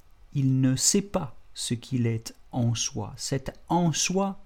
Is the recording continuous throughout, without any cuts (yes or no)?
yes